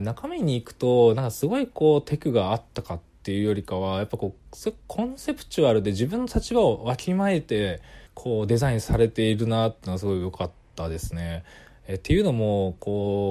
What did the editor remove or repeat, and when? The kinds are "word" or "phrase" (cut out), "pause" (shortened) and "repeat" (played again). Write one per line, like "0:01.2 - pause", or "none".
0:08.1 - pause